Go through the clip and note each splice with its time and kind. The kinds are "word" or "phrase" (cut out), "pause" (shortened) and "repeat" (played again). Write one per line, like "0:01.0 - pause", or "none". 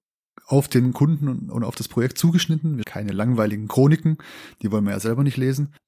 0:02.8 - word